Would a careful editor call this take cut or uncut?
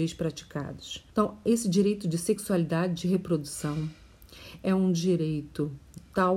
cut